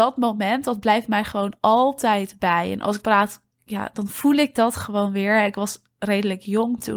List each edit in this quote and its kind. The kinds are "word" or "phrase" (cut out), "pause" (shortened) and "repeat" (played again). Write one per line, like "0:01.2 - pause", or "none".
0:03.0 - word